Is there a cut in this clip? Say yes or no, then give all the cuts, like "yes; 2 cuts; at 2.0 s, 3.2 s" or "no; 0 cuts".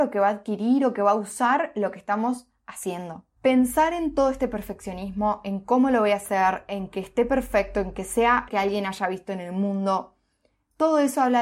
yes; 2 cuts; at 3.4 s, 8.5 s